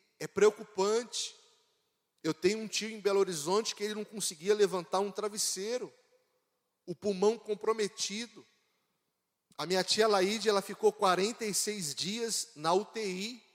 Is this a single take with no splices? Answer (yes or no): yes